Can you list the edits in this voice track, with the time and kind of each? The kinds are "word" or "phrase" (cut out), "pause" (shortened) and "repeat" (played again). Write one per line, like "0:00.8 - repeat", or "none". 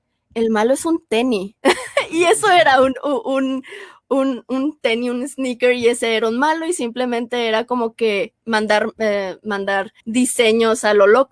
0:01.6 - pause
0:08.4 - pause
0:10.0 - pause